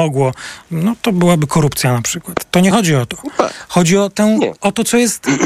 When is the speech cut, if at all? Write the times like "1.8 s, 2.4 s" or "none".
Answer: none